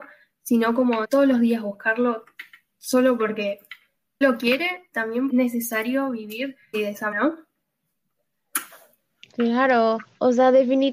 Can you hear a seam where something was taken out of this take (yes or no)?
yes